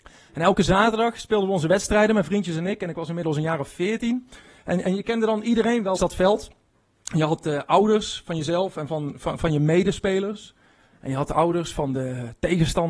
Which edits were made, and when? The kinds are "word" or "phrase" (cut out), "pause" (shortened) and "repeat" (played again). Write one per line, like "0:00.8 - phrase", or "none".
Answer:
0:06.0 - word